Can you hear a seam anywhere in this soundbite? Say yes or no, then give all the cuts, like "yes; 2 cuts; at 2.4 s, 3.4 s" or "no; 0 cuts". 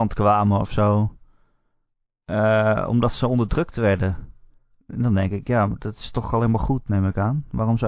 no; 0 cuts